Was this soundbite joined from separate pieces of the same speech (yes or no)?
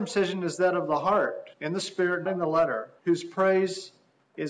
yes